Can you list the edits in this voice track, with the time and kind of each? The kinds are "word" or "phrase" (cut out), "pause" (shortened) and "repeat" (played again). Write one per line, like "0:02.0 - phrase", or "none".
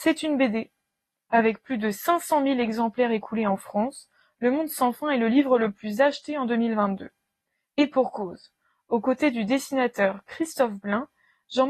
none